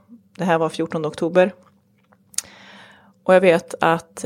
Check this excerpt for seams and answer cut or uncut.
uncut